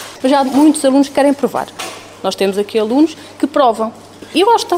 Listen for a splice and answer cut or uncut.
uncut